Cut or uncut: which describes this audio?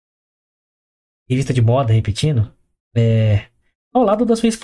uncut